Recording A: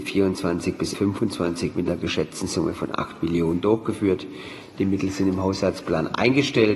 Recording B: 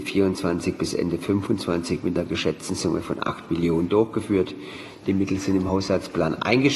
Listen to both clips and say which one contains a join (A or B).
A